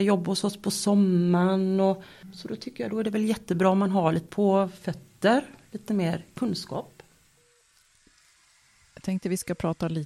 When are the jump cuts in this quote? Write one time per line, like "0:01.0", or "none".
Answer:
0:04.3